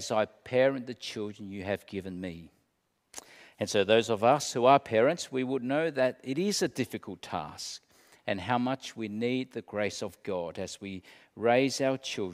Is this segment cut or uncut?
uncut